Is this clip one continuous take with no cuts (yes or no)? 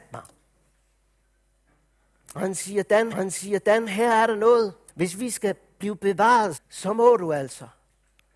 no